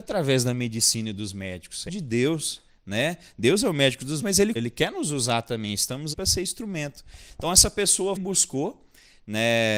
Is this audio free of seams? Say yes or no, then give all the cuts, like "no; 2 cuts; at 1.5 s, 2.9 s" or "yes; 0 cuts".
no; 5 cuts; at 1.9 s, 4.2 s, 4.6 s, 6.1 s, 8.2 s